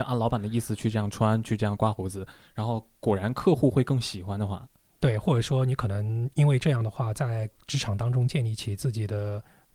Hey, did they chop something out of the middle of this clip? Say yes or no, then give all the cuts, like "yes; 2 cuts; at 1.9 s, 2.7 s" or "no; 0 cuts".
no; 0 cuts